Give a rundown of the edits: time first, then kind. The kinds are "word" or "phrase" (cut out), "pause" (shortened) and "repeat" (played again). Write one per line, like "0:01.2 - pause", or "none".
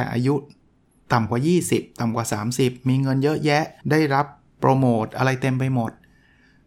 0:03.8 - pause